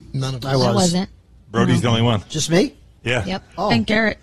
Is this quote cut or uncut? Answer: uncut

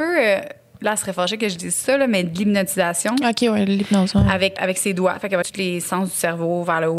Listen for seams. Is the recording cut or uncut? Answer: cut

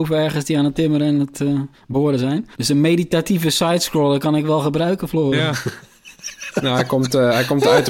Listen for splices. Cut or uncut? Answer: cut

